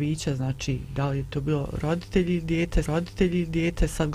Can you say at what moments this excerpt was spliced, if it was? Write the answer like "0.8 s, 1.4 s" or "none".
2.9 s

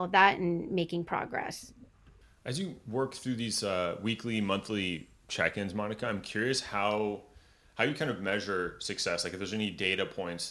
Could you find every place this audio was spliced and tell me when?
none

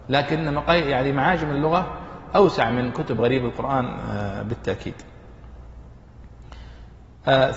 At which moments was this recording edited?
none

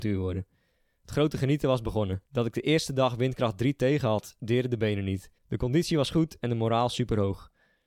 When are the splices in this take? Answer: 2.3 s, 5.4 s

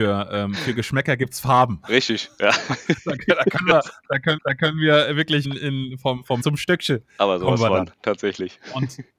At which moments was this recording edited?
4.4 s, 5.4 s, 6.4 s, 7.9 s

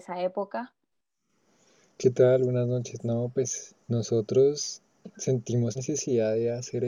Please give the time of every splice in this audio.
3.8 s, 5.7 s

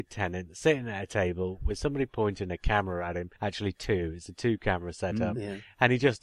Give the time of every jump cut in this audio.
3.4 s

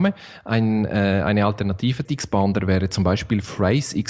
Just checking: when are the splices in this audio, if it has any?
2.0 s

